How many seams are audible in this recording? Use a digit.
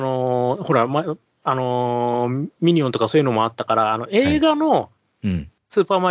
0